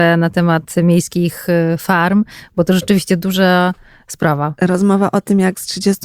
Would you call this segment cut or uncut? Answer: uncut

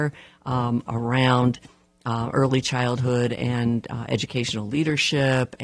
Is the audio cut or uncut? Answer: uncut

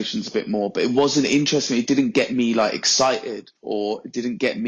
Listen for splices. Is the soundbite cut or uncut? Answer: cut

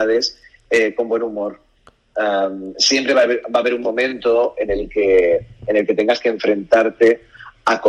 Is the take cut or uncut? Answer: uncut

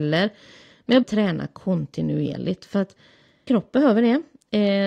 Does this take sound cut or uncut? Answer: cut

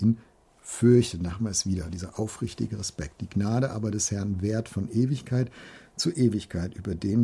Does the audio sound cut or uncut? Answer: uncut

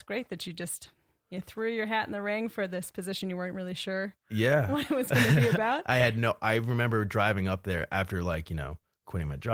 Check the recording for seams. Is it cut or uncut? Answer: uncut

